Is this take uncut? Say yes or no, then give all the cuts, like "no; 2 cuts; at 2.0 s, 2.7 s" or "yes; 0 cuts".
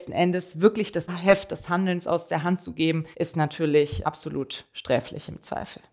no; 3 cuts; at 1.1 s, 3.1 s, 4.0 s